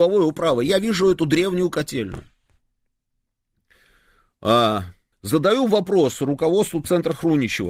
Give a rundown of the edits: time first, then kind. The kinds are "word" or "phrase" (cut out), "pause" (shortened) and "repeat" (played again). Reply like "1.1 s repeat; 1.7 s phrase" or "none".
5.1 s pause